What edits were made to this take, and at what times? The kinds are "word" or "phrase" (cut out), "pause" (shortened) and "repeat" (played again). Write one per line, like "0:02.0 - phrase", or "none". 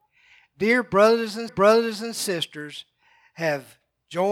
0:01.5 - repeat